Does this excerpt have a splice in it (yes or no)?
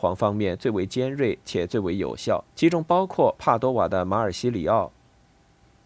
yes